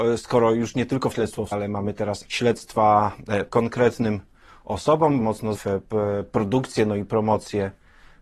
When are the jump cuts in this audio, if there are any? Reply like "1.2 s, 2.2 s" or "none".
1.1 s, 1.5 s, 2.2 s, 3.5 s, 5.2 s, 5.5 s

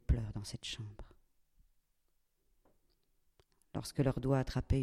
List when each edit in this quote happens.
none

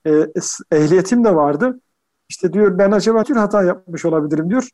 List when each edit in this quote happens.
3.2 s

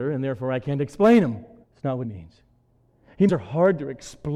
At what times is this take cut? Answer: 1.6 s, 2.0 s, 3.3 s

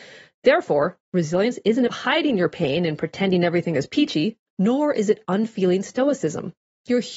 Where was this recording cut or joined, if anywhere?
1.9 s, 4.5 s

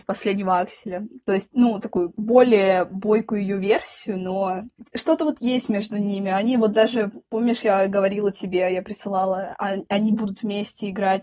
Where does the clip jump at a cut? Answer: 7.2 s

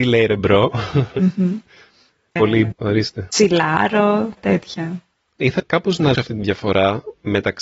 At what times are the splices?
2.4 s, 2.7 s, 4.4 s, 5.6 s, 6.1 s

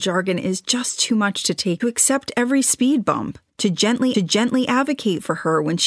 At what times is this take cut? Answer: 1.8 s, 3.5 s, 4.1 s

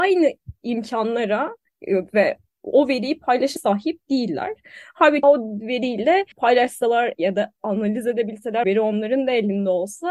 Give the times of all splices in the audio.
3.6 s, 5.2 s, 6.3 s, 8.6 s

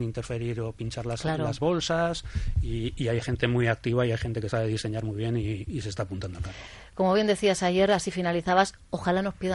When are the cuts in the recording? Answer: none

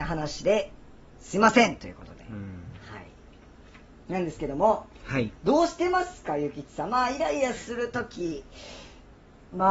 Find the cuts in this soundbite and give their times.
none

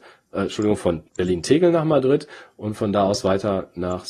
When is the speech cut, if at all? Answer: 1.1 s

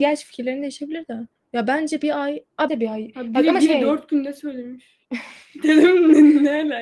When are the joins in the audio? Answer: 1.4 s, 2.7 s, 5.0 s

